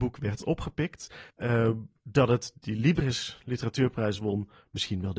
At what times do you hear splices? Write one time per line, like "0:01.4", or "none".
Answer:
0:01.3